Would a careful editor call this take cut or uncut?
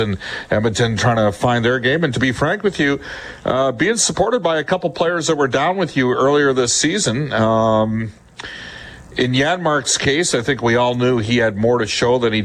uncut